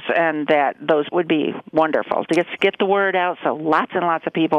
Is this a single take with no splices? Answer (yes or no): no